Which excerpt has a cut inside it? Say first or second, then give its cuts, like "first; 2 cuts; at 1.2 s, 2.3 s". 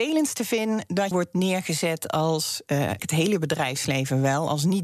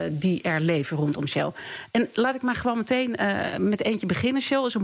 first; 2 cuts; at 1.1 s, 3.0 s